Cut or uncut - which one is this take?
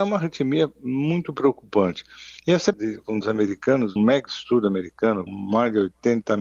cut